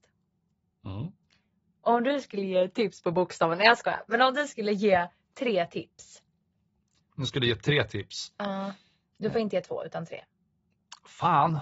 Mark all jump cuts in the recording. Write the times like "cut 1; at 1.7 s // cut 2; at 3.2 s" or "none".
none